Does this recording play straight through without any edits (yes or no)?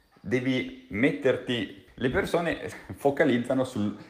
no